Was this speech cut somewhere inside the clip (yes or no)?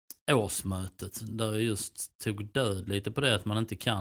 no